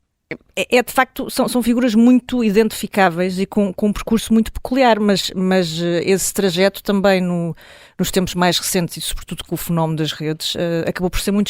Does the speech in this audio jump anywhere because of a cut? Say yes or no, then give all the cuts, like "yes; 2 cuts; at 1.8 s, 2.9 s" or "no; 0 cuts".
no; 0 cuts